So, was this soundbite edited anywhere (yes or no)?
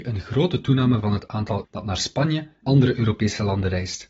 yes